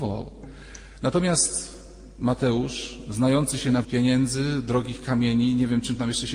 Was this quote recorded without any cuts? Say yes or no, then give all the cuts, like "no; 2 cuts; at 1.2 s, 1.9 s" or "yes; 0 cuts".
no; 1 cut; at 3.8 s